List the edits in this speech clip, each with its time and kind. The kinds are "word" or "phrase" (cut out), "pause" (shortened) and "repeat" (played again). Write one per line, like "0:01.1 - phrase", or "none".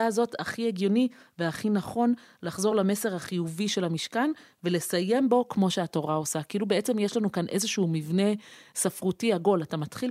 none